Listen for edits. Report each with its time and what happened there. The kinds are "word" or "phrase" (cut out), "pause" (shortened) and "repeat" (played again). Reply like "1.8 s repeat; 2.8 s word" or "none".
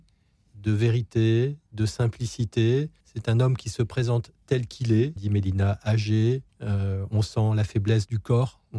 3.0 s pause; 5.2 s phrase